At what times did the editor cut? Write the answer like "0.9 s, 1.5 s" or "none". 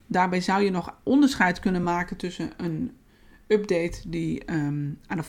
none